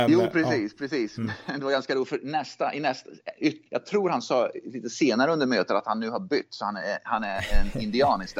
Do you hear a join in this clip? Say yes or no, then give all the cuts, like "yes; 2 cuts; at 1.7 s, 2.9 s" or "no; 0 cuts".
yes; 1 cut; at 3.7 s